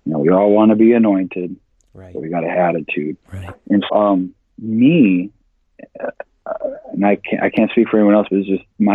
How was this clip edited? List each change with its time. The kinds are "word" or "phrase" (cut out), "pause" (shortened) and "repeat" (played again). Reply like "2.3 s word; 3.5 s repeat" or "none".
2.5 s phrase; 3.2 s pause; 3.9 s word